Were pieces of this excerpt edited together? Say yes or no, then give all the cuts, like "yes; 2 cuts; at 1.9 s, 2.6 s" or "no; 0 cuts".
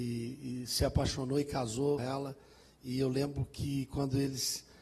yes; 1 cut; at 2.0 s